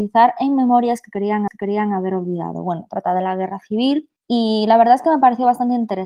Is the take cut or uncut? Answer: cut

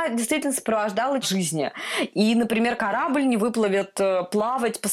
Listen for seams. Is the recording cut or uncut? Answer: cut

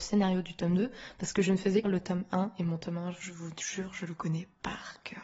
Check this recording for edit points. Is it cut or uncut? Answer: cut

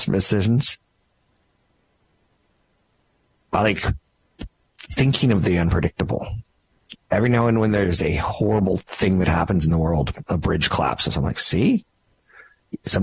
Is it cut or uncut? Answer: uncut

